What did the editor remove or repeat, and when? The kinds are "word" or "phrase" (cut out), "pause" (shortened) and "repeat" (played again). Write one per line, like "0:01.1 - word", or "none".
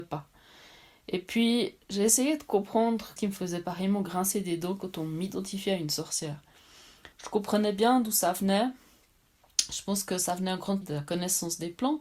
0:01.8 - word
0:03.2 - word
0:07.1 - pause
0:10.8 - word